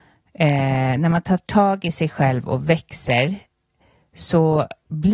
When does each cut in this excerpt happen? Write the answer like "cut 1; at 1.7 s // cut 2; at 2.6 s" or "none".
none